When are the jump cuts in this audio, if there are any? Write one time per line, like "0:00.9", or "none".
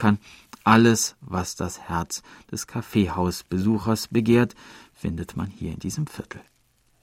none